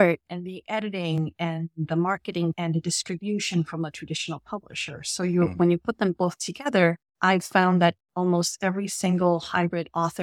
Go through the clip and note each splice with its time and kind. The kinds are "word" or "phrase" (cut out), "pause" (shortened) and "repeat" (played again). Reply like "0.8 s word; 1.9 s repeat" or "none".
2.5 s word; 7.1 s pause